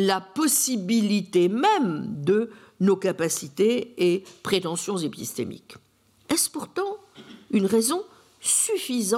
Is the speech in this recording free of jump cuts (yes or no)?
yes